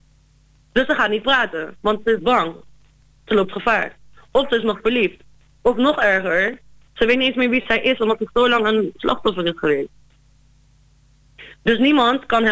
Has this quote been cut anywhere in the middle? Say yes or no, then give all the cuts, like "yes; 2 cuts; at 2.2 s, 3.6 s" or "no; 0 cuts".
no; 0 cuts